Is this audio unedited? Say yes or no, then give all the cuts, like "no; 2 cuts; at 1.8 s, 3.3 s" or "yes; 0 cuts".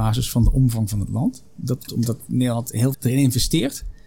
no; 2 cuts; at 1.9 s, 2.9 s